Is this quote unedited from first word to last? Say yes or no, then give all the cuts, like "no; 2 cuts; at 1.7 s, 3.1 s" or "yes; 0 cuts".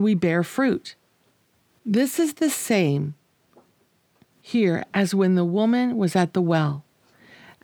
yes; 0 cuts